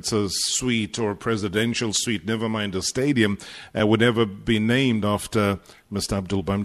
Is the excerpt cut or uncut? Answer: uncut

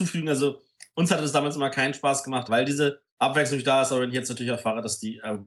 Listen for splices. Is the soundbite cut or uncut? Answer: cut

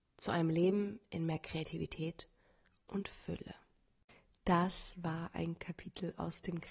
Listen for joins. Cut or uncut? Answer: uncut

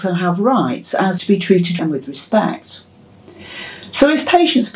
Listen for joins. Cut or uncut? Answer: cut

